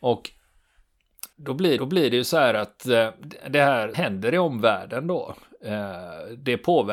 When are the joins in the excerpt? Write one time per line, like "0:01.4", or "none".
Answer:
0:01.3
0:01.8
0:03.9